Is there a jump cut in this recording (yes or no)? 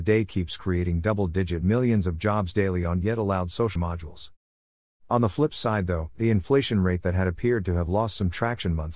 yes